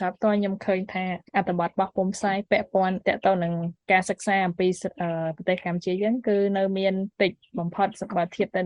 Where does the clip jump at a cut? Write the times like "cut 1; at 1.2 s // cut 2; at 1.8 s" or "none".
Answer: cut 1; at 7.1 s